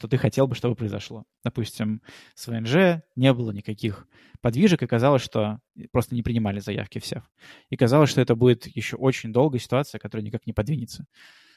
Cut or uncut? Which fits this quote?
uncut